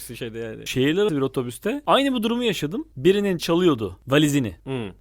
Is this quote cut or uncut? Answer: cut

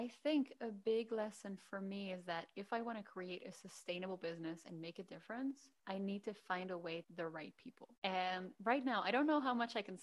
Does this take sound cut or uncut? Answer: cut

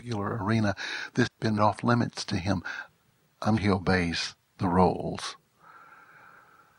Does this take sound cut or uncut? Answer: cut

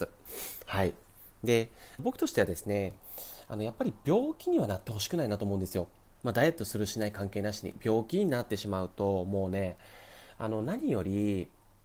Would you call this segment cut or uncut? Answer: cut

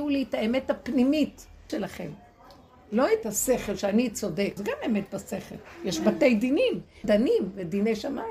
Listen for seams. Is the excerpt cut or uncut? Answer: cut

